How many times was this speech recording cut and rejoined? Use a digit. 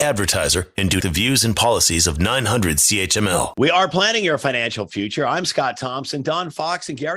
1